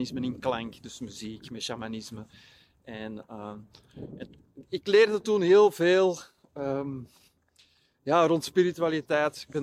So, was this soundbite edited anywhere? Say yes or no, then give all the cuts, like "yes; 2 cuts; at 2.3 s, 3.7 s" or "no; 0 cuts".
no; 0 cuts